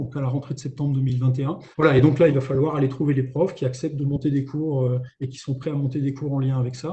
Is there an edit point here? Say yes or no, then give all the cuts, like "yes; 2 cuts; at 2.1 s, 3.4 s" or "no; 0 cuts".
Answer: yes; 2 cuts; at 1.7 s, 2.3 s